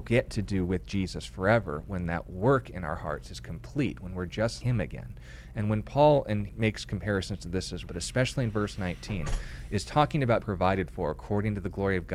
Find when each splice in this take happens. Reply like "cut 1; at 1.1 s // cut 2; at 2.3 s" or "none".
cut 1; at 4.6 s // cut 2; at 6.5 s // cut 3; at 7.9 s // cut 4; at 10.4 s